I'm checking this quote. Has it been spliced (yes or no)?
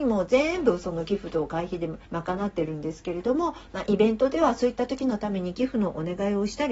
yes